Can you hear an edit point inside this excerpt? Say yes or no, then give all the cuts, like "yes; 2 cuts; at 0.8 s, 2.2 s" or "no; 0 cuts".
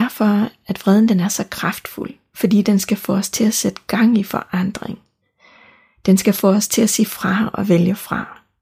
no; 0 cuts